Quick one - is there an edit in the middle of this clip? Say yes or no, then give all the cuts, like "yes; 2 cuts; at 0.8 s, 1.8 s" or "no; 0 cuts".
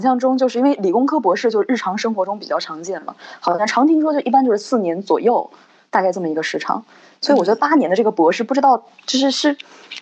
no; 0 cuts